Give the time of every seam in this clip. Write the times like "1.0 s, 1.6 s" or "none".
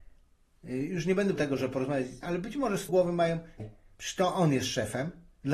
1.4 s, 2.2 s, 2.9 s, 3.6 s